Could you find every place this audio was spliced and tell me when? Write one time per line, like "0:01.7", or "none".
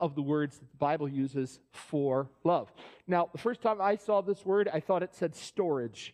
none